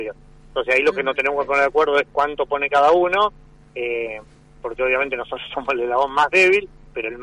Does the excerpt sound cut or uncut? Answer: uncut